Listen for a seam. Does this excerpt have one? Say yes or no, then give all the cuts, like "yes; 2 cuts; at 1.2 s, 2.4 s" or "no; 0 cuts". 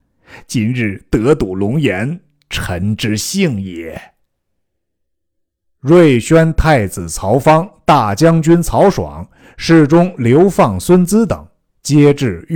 no; 0 cuts